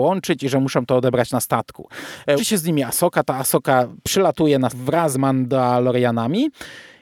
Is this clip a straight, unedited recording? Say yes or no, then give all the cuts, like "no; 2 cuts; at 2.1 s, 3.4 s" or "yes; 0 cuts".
no; 3 cuts; at 2.4 s, 4.7 s, 5.1 s